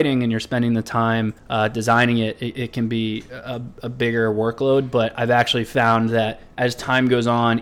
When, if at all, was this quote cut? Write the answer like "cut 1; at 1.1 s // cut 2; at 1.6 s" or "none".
cut 1; at 1.4 s